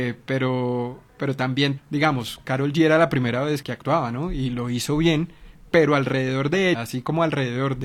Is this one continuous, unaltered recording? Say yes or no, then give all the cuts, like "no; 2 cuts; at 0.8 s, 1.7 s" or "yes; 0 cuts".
no; 3 cuts; at 1.8 s, 3.6 s, 6.7 s